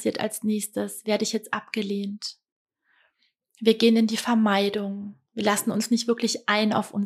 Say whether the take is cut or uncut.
uncut